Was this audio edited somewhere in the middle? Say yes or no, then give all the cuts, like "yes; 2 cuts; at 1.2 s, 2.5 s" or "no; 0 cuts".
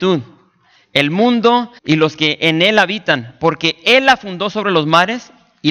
yes; 1 cut; at 1.8 s